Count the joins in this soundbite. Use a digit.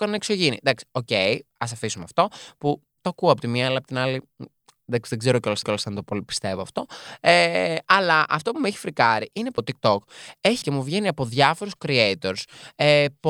3